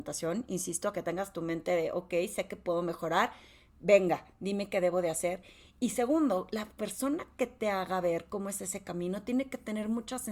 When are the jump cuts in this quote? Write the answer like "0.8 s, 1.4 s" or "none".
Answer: none